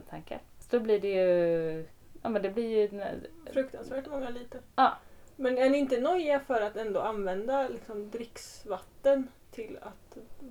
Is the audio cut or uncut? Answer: uncut